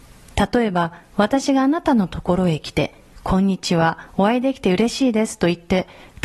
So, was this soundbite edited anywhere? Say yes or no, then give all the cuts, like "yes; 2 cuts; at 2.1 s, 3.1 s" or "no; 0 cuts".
yes; 2 cuts; at 1.0 s, 4.1 s